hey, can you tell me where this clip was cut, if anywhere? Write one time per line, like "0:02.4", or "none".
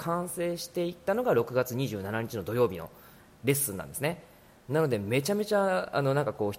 none